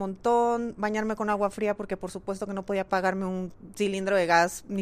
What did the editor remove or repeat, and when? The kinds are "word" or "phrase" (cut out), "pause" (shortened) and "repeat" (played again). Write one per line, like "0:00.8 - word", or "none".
none

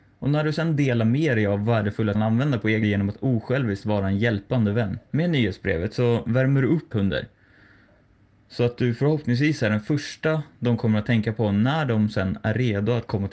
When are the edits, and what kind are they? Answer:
0:02.1 - phrase
0:02.8 - phrase
0:05.1 - pause
0:06.9 - word

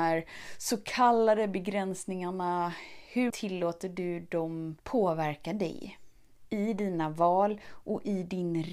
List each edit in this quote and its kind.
0:03.3 - word
0:04.8 - pause

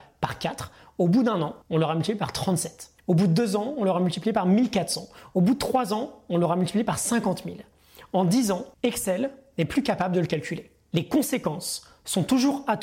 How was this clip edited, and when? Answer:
0:01.6 - pause
0:03.0 - pause
0:08.7 - pause

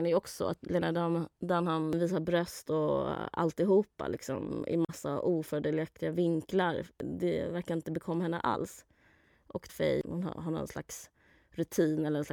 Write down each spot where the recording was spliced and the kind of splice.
0:09.7 - phrase

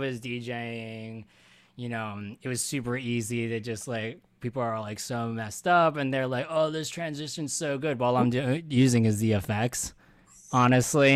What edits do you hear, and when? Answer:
none

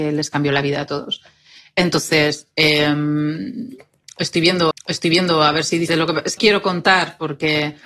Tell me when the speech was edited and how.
0:04.7 - repeat
0:05.9 - word
0:06.4 - word

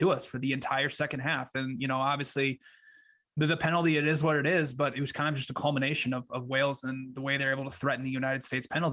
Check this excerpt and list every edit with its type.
none

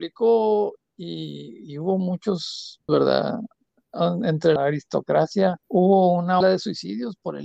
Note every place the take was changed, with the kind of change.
0:02.9 - phrase
0:04.6 - word
0:05.6 - pause
0:06.4 - word

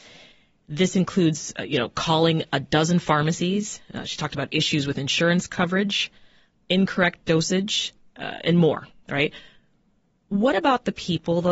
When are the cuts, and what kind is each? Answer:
none

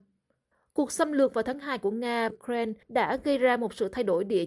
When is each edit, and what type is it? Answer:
0:02.3 - word
0:02.8 - pause

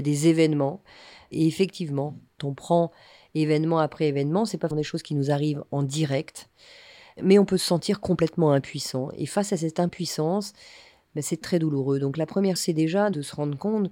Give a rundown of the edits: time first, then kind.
0:02.4 - word
0:04.7 - word
0:11.4 - word
0:12.6 - word

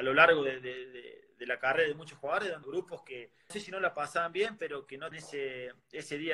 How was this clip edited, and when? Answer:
0:02.6 - word
0:03.5 - word
0:05.1 - word

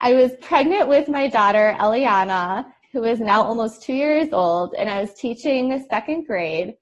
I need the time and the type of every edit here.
none

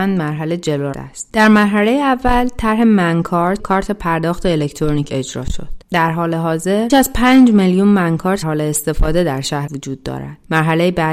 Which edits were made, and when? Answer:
0:00.9 - word
0:03.6 - word
0:05.1 - word
0:06.9 - word
0:08.4 - word
0:09.7 - word

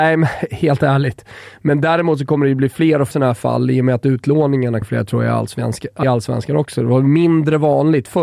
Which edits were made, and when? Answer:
0:03.1 - word
0:04.8 - phrase
0:06.0 - word

